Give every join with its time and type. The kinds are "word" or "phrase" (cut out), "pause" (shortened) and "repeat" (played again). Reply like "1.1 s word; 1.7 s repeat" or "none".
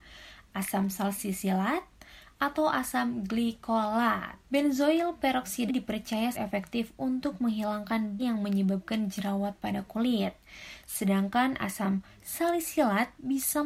4.5 s pause; 5.7 s word; 6.3 s word; 8.2 s word